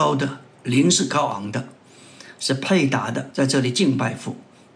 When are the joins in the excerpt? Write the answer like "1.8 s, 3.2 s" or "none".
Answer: 3.3 s